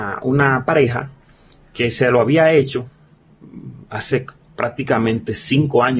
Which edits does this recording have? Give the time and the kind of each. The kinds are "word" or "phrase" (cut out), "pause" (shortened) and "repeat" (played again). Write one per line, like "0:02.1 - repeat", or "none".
none